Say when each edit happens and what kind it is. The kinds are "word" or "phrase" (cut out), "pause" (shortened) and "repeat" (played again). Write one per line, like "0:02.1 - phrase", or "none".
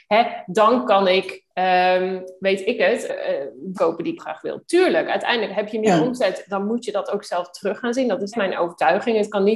0:01.5 - pause
0:03.1 - word
0:03.8 - word
0:04.2 - word
0:08.3 - word